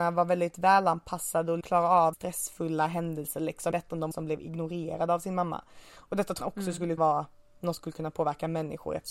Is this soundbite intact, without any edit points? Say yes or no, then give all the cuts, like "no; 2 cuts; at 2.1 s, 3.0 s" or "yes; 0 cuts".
no; 7 cuts; at 1.6 s, 2.1 s, 3.7 s, 4.1 s, 6.4 s, 7.0 s, 7.8 s